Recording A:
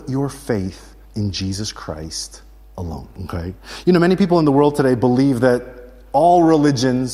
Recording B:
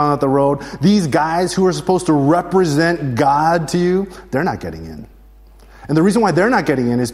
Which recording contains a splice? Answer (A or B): A